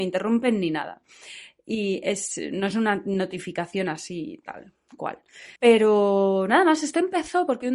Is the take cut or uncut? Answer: cut